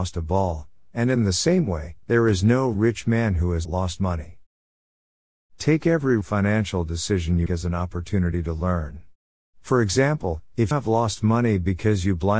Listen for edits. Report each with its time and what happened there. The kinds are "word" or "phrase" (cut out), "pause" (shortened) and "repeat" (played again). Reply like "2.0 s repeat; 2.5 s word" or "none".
2.0 s pause; 3.6 s word; 6.2 s word; 7.5 s word; 10.7 s word